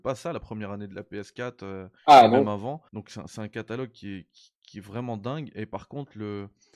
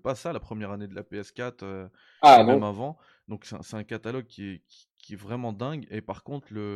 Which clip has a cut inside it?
first; 2 cuts; at 2.0 s, 2.9 s

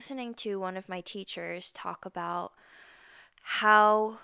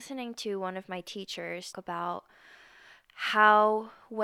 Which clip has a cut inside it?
second; 1 cut; at 1.7 s

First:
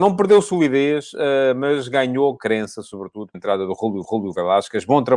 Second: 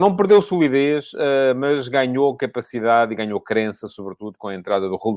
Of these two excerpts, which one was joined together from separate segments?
first; 3 cuts; at 2.4 s, 3.3 s, 4.0 s

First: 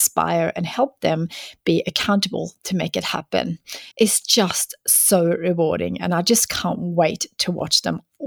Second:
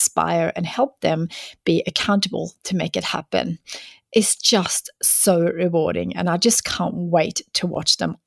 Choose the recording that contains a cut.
first; 1 cut; at 3.9 s

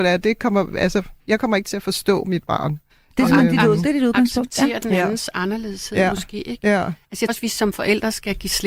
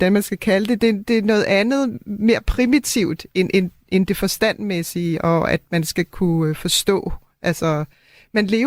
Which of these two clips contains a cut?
first; 3 cuts; at 1.2 s, 2.9 s, 7.3 s

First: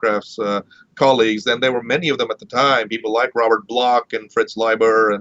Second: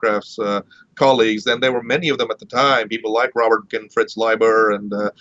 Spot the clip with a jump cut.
second; 1 cut; at 3.7 s

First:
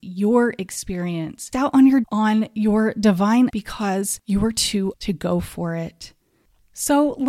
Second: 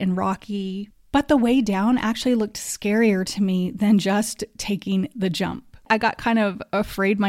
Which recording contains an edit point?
first; 4 cuts; at 1.5 s, 2.0 s, 3.5 s, 4.9 s

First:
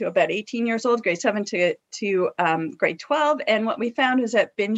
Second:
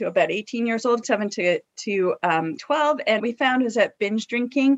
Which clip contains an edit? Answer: second; 3 cuts; at 1.0 s, 2.6 s, 3.2 s

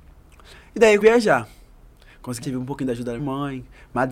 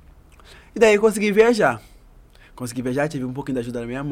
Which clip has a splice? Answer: first; 3 cuts; at 1.0 s, 2.4 s, 3.2 s

